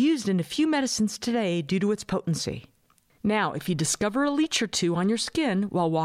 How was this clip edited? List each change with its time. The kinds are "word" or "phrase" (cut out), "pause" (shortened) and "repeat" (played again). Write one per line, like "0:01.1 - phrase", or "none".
none